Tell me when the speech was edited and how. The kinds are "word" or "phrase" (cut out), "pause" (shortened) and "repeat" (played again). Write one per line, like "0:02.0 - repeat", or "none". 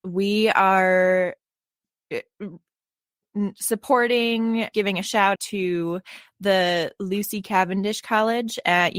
0:04.7 - word
0:05.4 - word